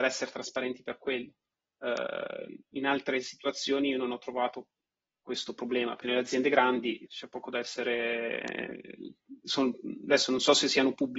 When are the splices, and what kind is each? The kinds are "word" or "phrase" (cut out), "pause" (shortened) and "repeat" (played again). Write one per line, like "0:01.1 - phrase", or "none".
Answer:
0:06.0 - word
0:07.1 - word